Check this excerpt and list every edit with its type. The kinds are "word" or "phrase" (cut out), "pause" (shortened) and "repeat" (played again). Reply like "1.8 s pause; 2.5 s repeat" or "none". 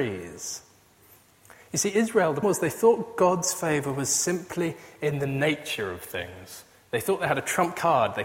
2.4 s word